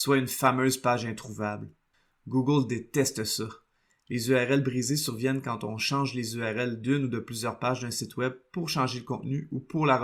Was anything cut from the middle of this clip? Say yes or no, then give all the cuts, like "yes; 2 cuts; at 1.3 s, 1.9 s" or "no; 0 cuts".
no; 0 cuts